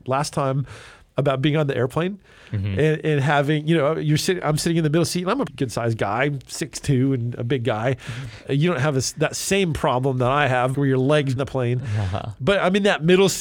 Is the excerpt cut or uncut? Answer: cut